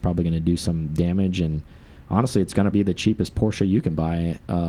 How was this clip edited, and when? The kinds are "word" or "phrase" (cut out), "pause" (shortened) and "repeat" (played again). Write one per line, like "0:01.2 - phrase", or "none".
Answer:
0:02.7 - word